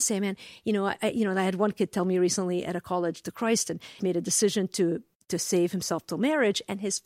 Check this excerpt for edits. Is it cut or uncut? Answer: cut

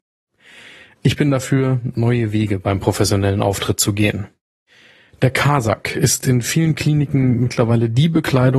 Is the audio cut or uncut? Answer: uncut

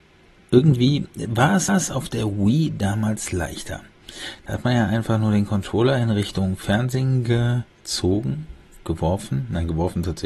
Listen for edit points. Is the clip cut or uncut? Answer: cut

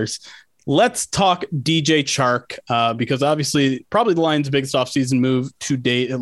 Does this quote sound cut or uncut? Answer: uncut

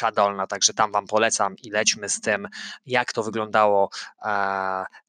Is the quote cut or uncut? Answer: uncut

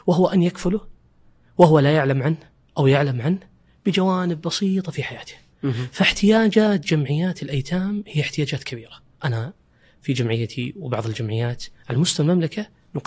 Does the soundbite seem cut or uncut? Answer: uncut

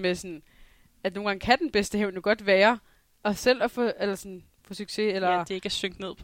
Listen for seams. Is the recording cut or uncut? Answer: uncut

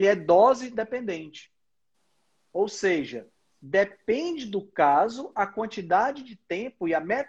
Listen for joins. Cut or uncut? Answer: uncut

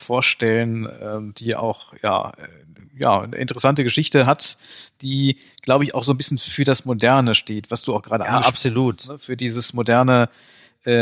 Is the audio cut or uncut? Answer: uncut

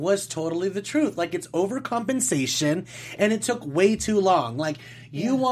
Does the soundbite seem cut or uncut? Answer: uncut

